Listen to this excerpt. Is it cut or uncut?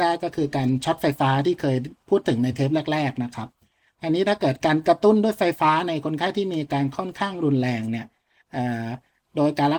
uncut